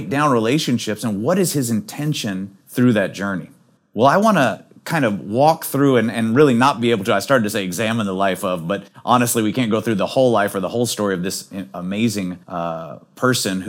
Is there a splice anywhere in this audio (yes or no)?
yes